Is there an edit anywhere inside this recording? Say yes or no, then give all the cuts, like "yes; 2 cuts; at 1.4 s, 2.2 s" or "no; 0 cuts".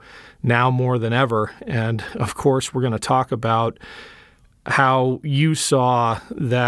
no; 0 cuts